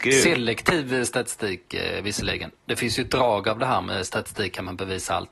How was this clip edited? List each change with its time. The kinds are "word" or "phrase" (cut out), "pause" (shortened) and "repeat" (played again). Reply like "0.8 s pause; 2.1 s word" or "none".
none